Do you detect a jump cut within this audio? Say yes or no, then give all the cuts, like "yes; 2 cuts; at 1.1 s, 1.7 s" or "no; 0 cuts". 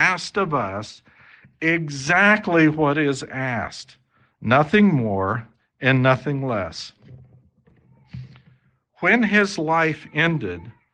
no; 0 cuts